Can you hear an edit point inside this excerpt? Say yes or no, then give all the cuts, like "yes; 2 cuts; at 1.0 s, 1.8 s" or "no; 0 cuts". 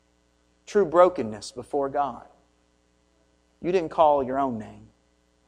no; 0 cuts